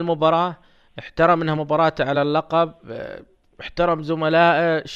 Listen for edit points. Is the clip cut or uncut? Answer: uncut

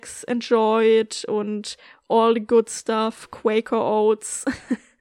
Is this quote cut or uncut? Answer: uncut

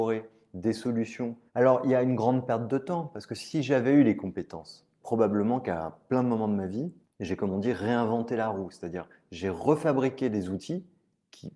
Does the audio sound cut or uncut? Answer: cut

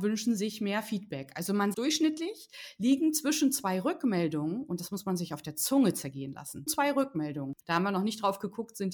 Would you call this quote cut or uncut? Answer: cut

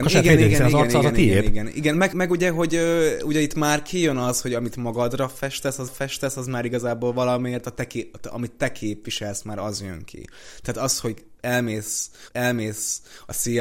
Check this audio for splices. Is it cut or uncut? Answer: cut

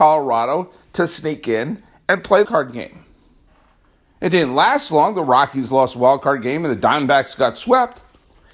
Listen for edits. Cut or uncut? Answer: cut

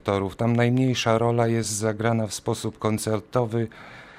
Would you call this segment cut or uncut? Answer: uncut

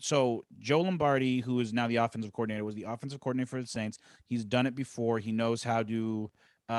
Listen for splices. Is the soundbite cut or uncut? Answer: uncut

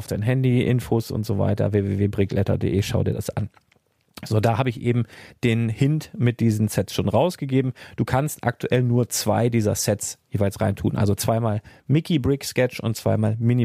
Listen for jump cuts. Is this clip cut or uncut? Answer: uncut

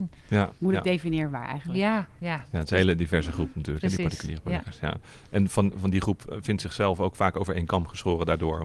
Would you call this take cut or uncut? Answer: uncut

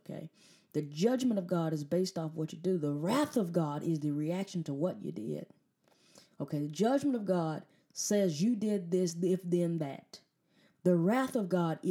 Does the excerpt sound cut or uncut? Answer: uncut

